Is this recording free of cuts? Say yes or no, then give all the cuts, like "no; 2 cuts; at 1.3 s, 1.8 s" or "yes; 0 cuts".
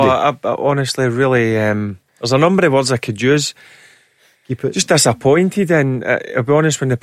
no; 1 cut; at 2.1 s